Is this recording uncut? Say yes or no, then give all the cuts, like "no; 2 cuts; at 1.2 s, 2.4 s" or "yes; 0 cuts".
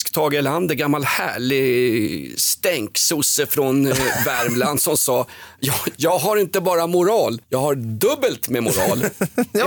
no; 1 cut; at 7.4 s